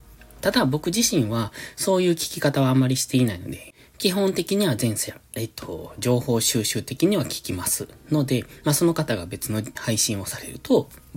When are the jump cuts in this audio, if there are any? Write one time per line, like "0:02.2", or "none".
0:09.8